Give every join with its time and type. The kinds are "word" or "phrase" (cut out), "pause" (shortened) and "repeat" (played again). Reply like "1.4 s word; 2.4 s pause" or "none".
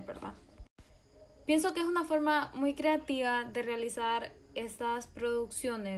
none